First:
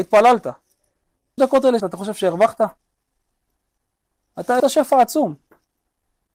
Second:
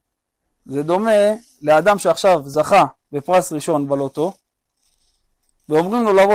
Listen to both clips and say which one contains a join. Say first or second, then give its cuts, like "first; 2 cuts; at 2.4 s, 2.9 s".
first; 3 cuts; at 1.4 s, 1.8 s, 4.6 s